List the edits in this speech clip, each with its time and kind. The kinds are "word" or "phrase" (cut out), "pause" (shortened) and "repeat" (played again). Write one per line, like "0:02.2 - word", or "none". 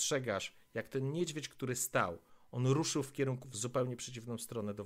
0:03.4 - word